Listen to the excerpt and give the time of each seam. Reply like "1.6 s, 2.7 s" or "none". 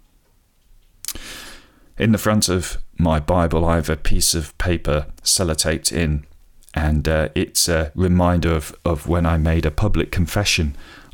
none